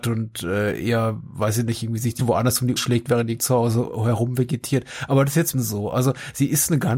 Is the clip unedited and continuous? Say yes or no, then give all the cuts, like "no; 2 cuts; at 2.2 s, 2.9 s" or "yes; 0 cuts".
no; 4 cuts; at 2.2 s, 2.8 s, 3.4 s, 5.5 s